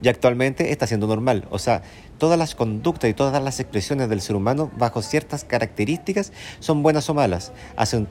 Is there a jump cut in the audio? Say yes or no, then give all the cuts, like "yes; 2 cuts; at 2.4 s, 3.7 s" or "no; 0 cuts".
no; 0 cuts